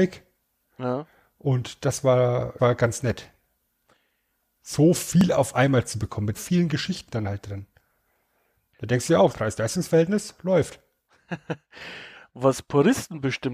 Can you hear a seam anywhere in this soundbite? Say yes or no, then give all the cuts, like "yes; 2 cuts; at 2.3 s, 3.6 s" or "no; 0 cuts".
yes; 3 cuts; at 2.6 s, 6.3 s, 9.3 s